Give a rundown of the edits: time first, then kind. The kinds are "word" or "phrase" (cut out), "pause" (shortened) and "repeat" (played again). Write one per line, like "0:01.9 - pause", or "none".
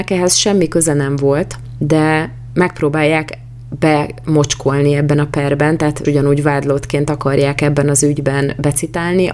0:06.0 - phrase